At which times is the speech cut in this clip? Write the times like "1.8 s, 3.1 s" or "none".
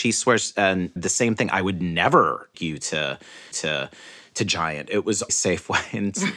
1.0 s, 2.5 s, 3.5 s, 5.3 s